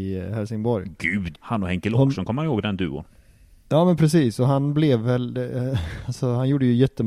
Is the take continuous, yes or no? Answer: no